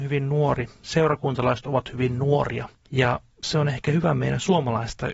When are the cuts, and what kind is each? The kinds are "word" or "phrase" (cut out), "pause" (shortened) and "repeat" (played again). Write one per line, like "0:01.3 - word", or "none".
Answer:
0:02.8 - pause